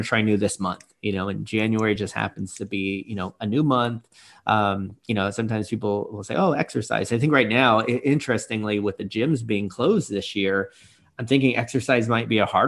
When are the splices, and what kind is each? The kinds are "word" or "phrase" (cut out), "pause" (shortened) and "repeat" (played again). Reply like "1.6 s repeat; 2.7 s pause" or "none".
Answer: none